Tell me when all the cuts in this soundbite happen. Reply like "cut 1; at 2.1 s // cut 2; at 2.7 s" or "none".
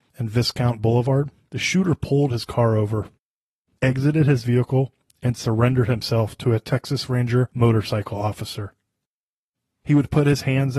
none